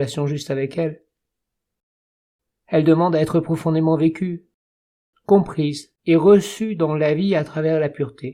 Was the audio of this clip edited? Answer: yes; 1 cut; at 6.0 s

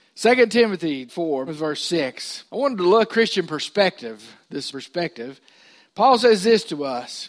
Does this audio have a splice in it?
yes; 5 cuts; at 1.1 s, 1.5 s, 2.5 s, 3.1 s, 4.7 s

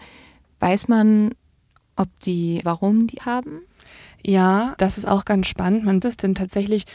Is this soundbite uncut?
no; 4 cuts; at 2.6 s, 3.2 s, 4.8 s, 6.0 s

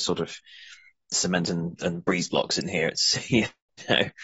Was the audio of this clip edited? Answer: no; 0 cuts

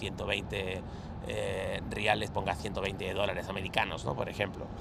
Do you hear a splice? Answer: yes; 1 cut; at 2.3 s

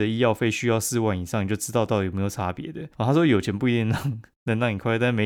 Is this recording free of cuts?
no; 1 cut; at 2.9 s

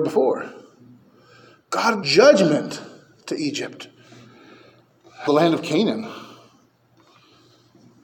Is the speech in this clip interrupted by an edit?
yes; 2 cuts; at 2.0 s, 5.3 s

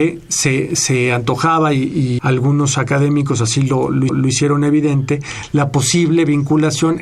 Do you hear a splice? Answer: yes; 2 cuts; at 2.2 s, 4.1 s

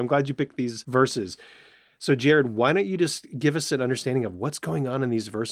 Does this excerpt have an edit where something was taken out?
no; 0 cuts

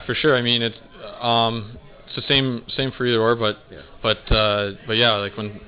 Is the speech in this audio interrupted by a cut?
no; 0 cuts

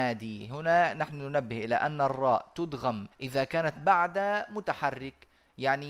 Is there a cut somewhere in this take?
yes; 2 cuts; at 3.1 s, 3.8 s

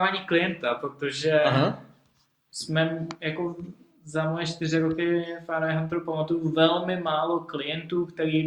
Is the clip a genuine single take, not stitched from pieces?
yes; 0 cuts

